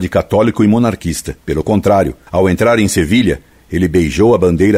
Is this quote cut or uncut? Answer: cut